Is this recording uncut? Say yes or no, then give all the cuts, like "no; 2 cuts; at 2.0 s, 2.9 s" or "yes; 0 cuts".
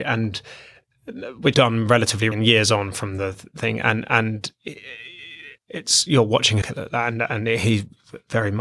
no; 4 cuts; at 1.5 s, 2.3 s, 5.6 s, 6.6 s